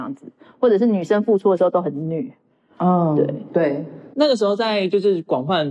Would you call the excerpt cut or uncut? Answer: uncut